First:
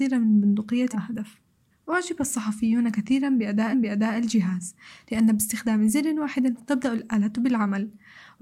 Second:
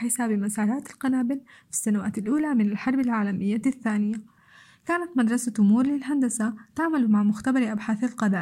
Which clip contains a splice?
first; 4 cuts; at 0.9 s, 1.7 s, 3.7 s, 6.6 s

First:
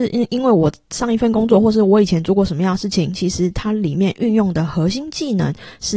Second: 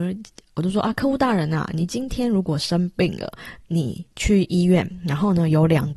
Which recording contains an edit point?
second; 1 cut; at 4.1 s

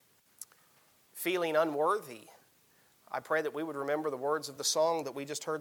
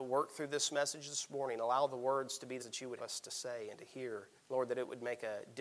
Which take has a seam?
second; 3 cuts; at 2.6 s, 3.0 s, 4.4 s

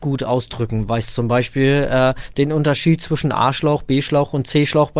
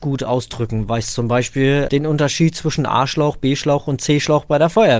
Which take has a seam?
second; 1 cut; at 1.9 s

